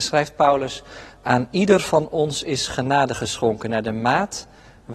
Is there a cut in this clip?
no; 0 cuts

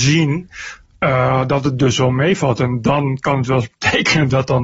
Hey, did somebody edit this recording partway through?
no; 0 cuts

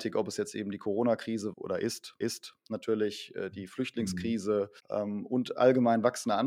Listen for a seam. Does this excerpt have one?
yes; 3 cuts; at 1.5 s, 2.2 s, 4.8 s

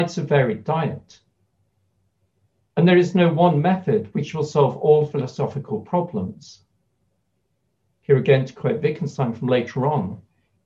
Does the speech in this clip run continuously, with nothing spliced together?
yes; 0 cuts

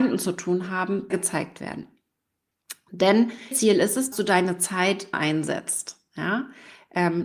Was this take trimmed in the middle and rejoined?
yes; 4 cuts; at 1.1 s, 3.5 s, 4.1 s, 5.1 s

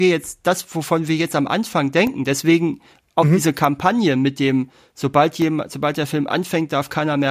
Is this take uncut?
yes; 0 cuts

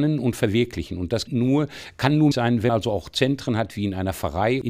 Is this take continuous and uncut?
no; 3 cuts; at 1.3 s, 2.3 s, 2.7 s

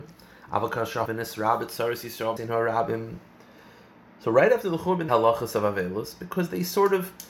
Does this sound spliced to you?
yes; 3 cuts; at 1.1 s, 2.4 s, 5.1 s

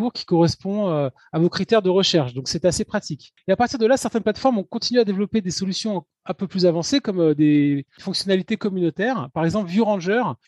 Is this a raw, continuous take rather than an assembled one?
yes; 0 cuts

